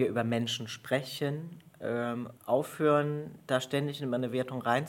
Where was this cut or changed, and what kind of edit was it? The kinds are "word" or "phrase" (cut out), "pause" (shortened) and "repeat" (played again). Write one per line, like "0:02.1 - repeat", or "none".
0:02.4 - pause